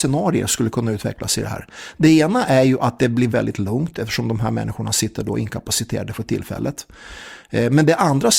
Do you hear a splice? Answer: yes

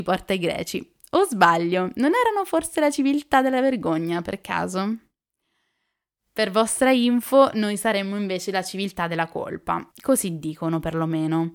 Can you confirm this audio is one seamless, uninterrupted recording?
no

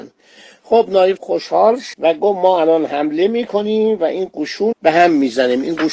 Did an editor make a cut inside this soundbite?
yes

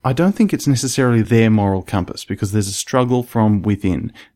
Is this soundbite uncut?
yes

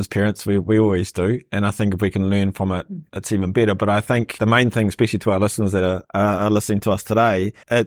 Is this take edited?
no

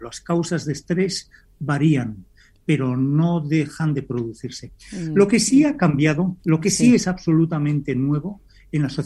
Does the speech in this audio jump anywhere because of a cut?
no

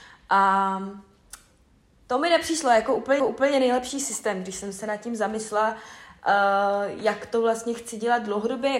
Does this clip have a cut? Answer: yes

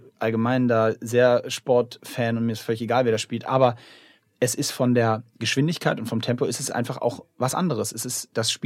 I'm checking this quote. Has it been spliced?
no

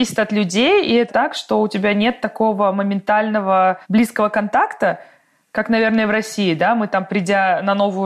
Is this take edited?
yes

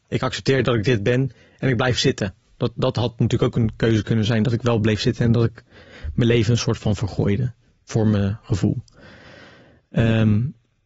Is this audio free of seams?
yes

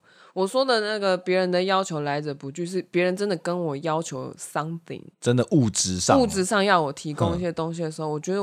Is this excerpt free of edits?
no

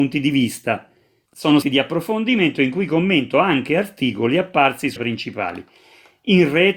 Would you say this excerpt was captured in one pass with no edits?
no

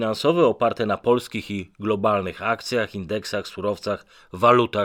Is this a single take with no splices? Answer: yes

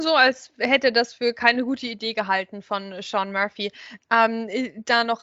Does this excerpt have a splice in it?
no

